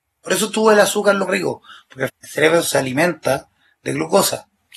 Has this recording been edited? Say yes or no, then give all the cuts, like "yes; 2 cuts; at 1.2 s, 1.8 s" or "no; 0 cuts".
yes; 2 cuts; at 1.3 s, 2.1 s